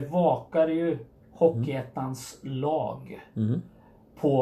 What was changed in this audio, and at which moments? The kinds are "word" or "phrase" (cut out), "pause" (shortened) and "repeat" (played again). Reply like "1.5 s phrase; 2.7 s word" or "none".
none